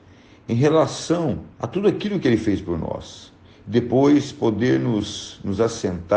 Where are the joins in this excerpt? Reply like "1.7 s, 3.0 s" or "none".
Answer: 1.5 s, 3.4 s